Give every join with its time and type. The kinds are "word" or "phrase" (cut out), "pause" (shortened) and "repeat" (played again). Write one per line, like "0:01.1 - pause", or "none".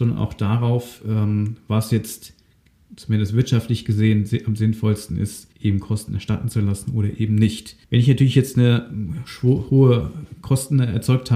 0:05.5 - pause
0:07.8 - pause